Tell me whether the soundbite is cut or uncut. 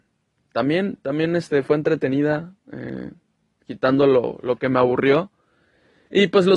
uncut